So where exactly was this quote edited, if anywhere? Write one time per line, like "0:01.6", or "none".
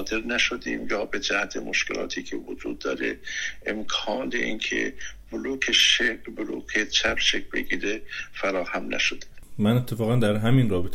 none